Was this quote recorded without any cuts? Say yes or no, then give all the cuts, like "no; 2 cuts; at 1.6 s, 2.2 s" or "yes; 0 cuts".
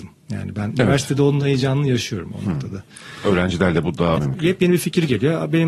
no; 1 cut; at 4.1 s